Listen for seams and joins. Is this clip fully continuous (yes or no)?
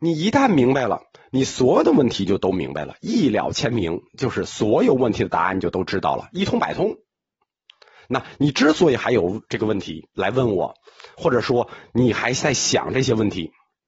yes